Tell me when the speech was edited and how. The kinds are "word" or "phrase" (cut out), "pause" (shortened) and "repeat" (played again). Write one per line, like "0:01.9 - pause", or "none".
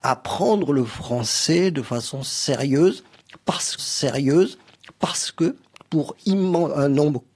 0:03.8 - repeat